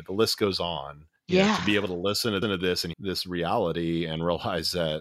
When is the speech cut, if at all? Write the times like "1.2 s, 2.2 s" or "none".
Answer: 1.2 s, 2.4 s, 2.9 s

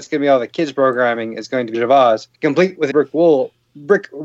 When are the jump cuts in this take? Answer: 1.7 s, 2.3 s, 2.9 s

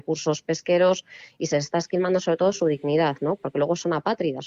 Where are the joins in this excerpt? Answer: none

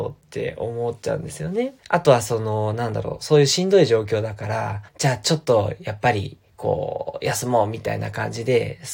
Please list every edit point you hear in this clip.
1.8 s, 4.9 s

